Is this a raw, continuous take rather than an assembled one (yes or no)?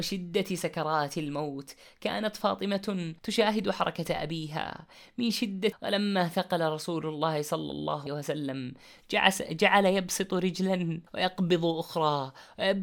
no